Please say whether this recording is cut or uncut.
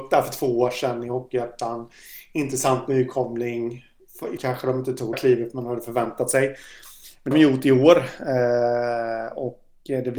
cut